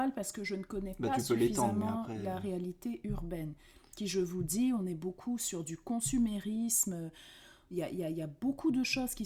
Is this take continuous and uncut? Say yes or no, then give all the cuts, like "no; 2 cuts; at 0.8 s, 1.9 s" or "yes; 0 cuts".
yes; 0 cuts